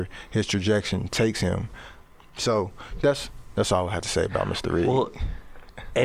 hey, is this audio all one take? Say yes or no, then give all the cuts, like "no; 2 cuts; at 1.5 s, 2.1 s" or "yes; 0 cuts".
yes; 0 cuts